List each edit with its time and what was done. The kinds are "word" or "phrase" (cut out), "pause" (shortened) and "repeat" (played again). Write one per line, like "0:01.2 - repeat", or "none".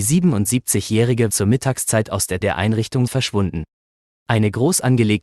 0:01.3 - word
0:02.4 - word
0:03.1 - word